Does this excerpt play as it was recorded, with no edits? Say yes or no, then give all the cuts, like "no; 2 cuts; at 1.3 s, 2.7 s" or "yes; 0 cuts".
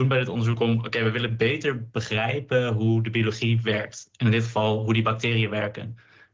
yes; 0 cuts